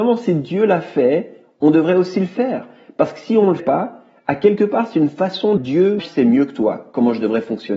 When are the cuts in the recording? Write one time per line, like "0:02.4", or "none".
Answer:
0:03.6
0:05.6
0:06.0